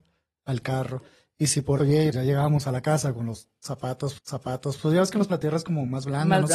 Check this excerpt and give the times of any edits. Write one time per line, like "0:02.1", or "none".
0:01.8
0:02.1
0:04.2
0:05.3